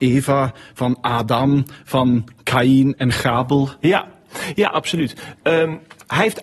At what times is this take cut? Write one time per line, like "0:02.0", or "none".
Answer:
none